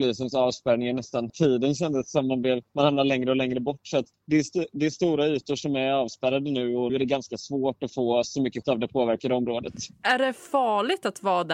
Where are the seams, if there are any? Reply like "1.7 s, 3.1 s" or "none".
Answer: 1.3 s, 2.7 s, 4.1 s, 6.9 s, 8.6 s, 9.9 s